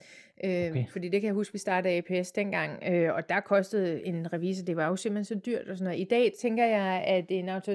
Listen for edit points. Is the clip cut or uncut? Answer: uncut